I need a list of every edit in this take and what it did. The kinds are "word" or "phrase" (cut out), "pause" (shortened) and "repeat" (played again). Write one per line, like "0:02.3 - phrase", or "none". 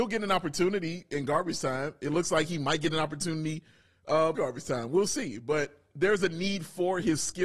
0:04.3 - word